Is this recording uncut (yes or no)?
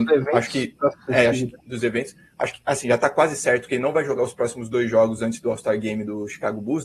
yes